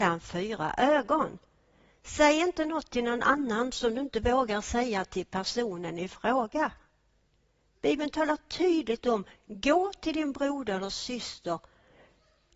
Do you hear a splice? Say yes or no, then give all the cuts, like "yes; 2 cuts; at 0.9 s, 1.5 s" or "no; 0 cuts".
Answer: no; 0 cuts